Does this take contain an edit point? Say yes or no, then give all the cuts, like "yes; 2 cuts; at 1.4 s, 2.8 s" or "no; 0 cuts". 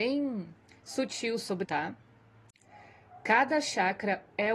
yes; 1 cut; at 1.6 s